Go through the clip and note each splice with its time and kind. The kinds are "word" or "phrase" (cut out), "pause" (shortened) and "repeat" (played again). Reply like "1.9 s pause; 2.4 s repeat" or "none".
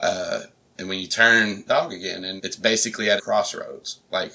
1.7 s phrase; 2.4 s word; 3.2 s word